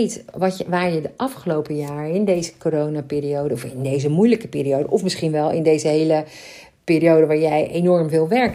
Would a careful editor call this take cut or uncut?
uncut